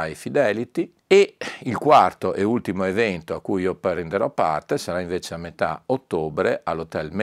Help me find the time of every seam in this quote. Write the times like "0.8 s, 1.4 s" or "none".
1.0 s